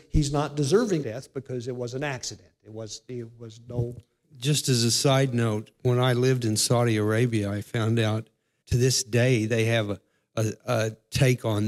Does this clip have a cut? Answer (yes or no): yes